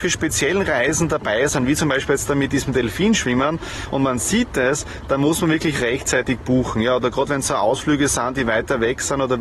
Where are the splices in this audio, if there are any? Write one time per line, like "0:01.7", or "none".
none